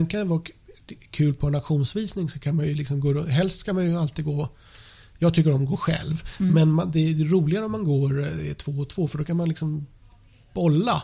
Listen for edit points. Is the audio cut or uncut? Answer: uncut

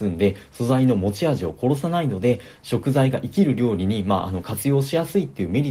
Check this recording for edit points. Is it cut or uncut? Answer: uncut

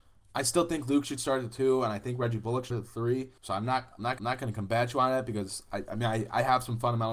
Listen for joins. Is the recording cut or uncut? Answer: cut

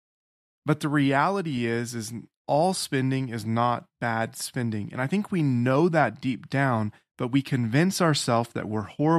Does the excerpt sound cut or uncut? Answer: uncut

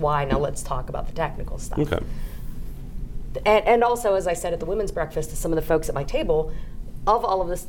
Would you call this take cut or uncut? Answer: uncut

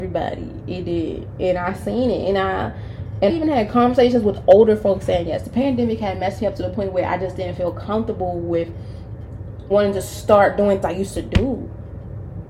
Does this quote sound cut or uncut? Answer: cut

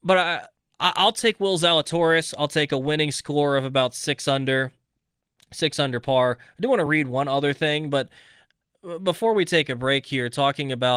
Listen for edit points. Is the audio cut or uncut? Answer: uncut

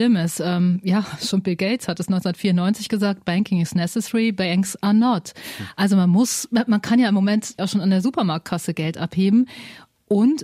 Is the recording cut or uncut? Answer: cut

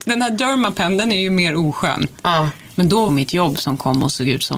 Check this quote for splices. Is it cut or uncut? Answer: cut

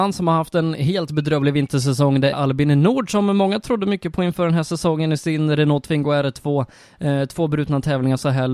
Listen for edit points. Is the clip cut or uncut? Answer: cut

